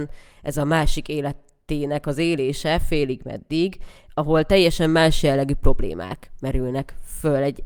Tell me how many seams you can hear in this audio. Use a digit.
0